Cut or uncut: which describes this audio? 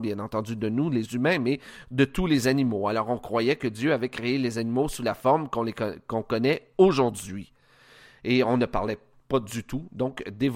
uncut